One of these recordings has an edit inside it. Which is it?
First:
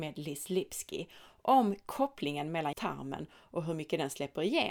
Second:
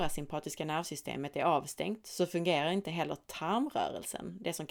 first; 1 cut; at 2.7 s

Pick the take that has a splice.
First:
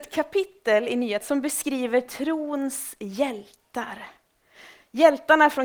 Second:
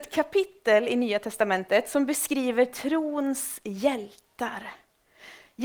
first; 1 cut; at 1.2 s

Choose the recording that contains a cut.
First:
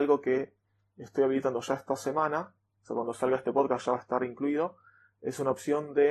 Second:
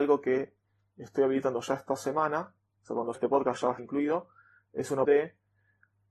second; 3 cuts; at 3.1 s, 3.8 s, 5.0 s

